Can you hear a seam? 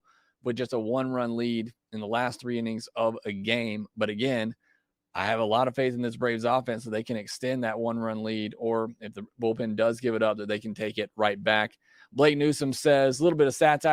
no; 0 cuts

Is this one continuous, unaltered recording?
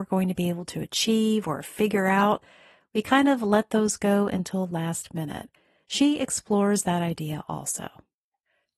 yes; 0 cuts

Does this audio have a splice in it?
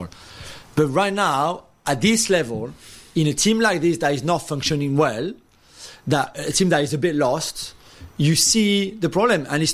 no; 0 cuts

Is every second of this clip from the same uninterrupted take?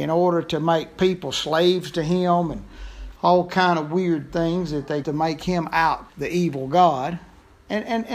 no; 3 cuts; at 3.2 s, 5.0 s, 6.1 s

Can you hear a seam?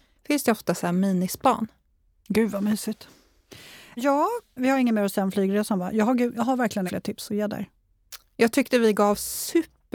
yes; 1 cut; at 6.9 s

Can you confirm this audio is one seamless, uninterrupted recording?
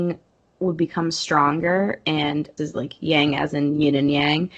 no; 1 cut; at 2.6 s

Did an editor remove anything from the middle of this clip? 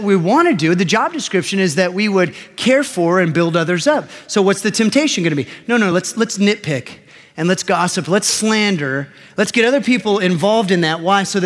no; 0 cuts

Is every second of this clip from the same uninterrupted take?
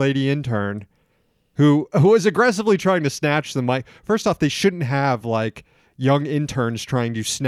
yes; 0 cuts

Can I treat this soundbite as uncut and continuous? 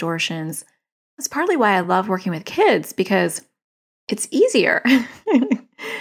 yes; 0 cuts

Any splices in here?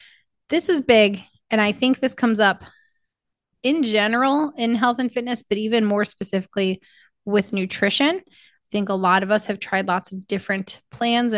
no; 0 cuts

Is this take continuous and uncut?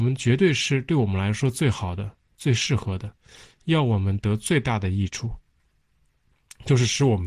yes; 0 cuts

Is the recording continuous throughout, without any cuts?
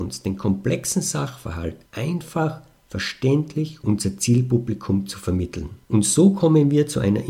no; 3 cuts; at 1.9 s, 3.8 s, 5.8 s

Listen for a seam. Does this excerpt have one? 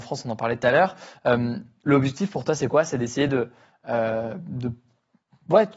no; 0 cuts

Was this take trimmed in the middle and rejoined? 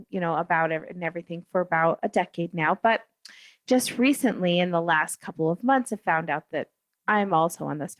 no; 0 cuts

